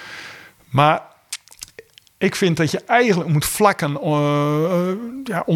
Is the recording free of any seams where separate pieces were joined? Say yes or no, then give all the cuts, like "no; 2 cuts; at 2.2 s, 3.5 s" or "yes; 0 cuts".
yes; 0 cuts